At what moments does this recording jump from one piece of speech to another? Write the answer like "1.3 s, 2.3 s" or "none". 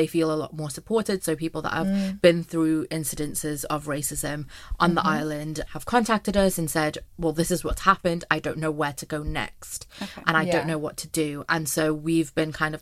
5.7 s